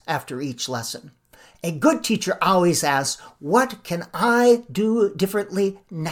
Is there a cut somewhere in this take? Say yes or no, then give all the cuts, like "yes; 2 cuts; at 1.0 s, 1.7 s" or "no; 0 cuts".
no; 0 cuts